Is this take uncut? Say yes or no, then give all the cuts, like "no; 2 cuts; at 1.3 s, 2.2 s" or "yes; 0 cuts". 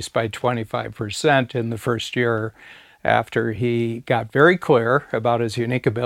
yes; 0 cuts